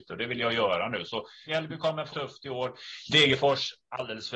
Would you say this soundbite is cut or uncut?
cut